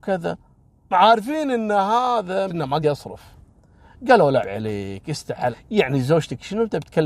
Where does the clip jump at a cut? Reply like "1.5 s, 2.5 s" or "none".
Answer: 0.9 s, 2.5 s, 2.8 s, 4.4 s, 5.5 s